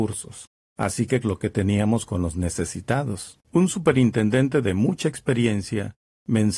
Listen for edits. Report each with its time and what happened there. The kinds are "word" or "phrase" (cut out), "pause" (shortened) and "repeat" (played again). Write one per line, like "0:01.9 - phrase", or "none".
0:01.2 - word
0:03.4 - pause
0:04.6 - phrase